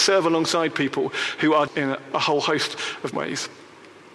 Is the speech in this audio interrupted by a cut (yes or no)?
yes